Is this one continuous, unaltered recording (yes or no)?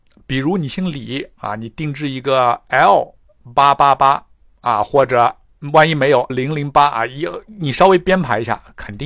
no